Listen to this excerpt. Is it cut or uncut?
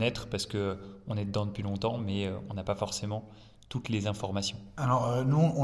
uncut